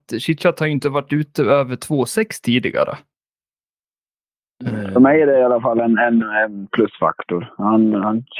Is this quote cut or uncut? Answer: uncut